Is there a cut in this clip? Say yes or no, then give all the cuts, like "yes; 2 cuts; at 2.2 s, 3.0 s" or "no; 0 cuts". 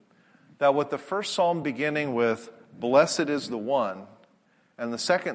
no; 0 cuts